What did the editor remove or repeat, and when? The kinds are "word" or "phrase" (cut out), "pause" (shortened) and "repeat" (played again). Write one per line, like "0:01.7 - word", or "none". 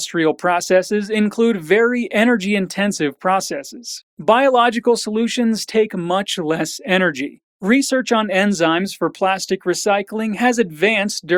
0:04.1 - pause